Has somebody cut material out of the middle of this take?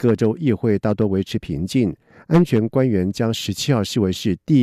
no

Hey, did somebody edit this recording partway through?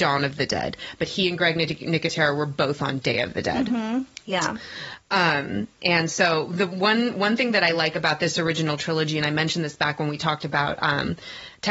no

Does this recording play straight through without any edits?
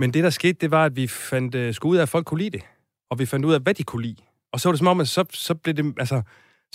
yes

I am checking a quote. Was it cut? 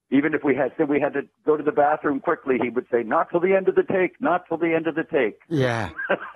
no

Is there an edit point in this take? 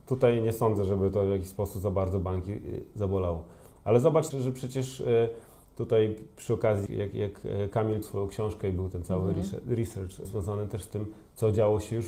yes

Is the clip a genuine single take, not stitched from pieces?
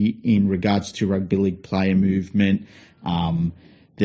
yes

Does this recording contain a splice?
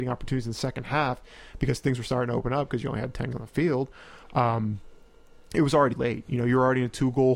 yes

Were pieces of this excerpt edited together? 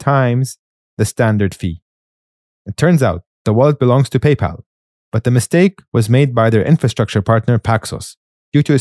yes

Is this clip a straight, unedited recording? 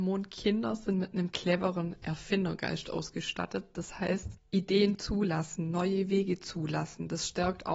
yes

